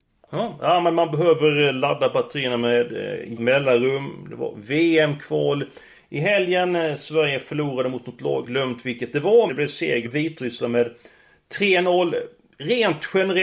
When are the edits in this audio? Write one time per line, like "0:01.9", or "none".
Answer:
0:03.4
0:08.4
0:09.5
0:10.1